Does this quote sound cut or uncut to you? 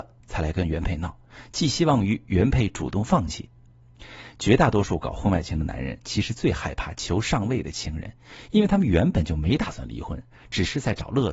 uncut